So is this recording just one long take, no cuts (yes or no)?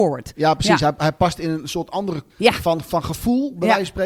no